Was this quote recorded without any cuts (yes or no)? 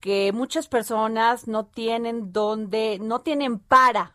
yes